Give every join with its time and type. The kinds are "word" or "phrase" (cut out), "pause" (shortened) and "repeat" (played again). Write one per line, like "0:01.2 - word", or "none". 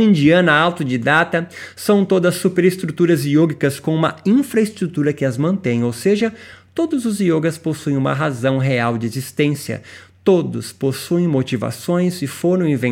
none